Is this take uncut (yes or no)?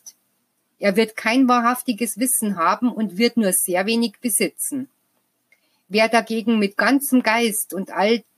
yes